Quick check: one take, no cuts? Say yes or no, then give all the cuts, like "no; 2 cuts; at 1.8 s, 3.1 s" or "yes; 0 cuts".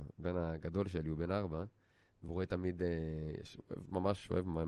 yes; 0 cuts